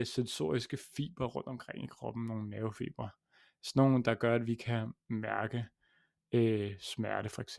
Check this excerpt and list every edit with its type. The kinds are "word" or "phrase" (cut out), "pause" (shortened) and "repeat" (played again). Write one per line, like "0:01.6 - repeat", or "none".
none